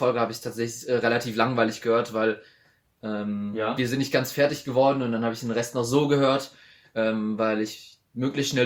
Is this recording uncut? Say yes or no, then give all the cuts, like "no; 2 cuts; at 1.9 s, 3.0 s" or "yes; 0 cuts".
yes; 0 cuts